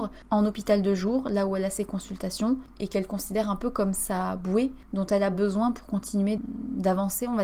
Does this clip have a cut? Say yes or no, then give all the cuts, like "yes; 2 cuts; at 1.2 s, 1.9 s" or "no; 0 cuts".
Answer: no; 0 cuts